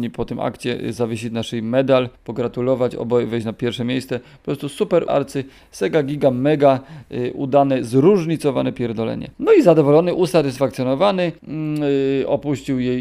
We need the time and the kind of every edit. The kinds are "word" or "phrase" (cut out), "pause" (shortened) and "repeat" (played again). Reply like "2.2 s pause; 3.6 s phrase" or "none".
2.2 s pause; 5.1 s word; 9.3 s pause; 11.4 s pause